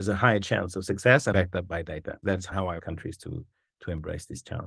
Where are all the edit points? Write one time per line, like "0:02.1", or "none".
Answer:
0:01.3
0:02.8